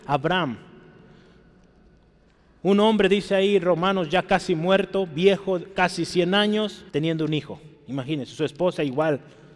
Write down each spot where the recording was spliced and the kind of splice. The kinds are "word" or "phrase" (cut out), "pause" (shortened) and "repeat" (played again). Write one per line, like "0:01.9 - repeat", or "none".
0:06.9 - pause
0:07.8 - pause